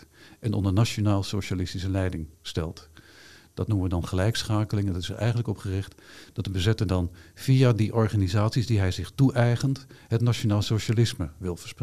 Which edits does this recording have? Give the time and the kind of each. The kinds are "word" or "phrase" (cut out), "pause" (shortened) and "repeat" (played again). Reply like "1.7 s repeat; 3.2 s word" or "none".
2.3 s pause